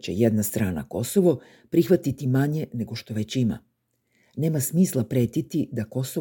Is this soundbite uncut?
yes; 0 cuts

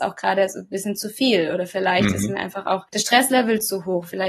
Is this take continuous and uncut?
no; 1 cut; at 2.9 s

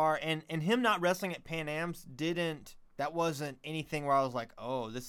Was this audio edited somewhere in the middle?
yes; 1 cut; at 2.9 s

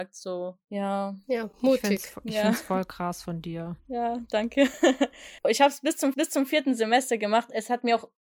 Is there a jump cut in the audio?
yes; 4 cuts; at 1.5 s, 3.8 s, 5.4 s, 6.1 s

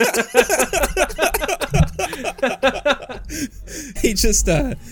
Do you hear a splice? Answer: yes; 1 cut; at 4.0 s

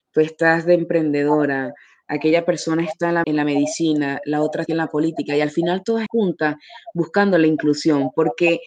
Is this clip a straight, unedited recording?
no; 3 cuts; at 3.2 s, 4.7 s, 6.1 s

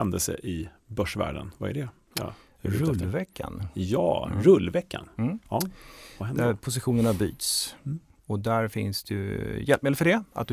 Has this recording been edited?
no; 0 cuts

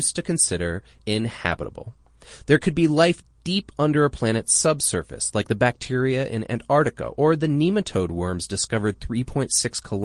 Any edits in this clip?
no; 0 cuts

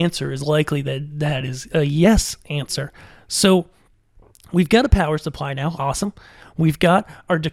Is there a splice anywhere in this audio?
no; 0 cuts

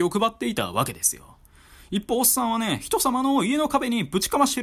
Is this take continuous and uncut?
yes; 0 cuts

